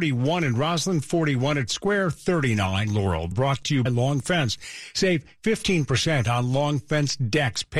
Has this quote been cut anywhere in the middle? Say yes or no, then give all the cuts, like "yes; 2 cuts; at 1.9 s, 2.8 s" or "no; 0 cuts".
yes; 4 cuts; at 1.7 s, 2.9 s, 3.3 s, 3.9 s